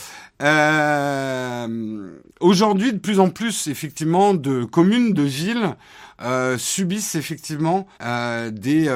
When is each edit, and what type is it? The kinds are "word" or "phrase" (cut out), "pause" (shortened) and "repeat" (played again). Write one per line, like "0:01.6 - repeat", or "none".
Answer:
0:02.3 - pause
0:07.9 - pause